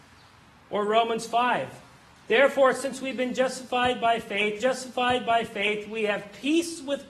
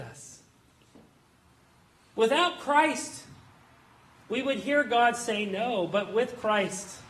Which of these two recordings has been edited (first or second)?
first